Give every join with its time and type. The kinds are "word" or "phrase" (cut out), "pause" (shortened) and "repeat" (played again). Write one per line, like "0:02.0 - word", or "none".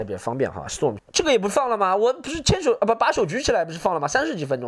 0:01.0 - phrase